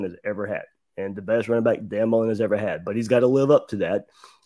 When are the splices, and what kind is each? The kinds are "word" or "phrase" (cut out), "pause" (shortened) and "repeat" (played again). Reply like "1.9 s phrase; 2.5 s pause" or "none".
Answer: none